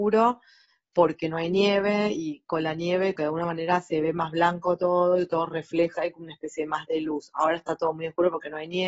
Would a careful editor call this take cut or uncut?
cut